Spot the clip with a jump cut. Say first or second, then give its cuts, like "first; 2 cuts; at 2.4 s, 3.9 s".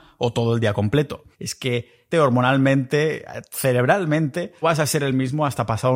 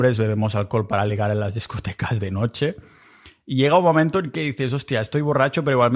first; 3 cuts; at 1.3 s, 2.1 s, 4.6 s